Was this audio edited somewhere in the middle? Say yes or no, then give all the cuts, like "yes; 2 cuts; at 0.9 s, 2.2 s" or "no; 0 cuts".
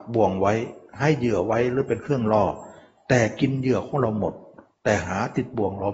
no; 0 cuts